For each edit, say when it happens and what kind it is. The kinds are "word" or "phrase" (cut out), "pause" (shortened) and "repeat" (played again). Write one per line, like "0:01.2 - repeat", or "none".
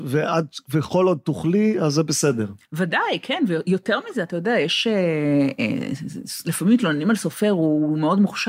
0:02.6 - pause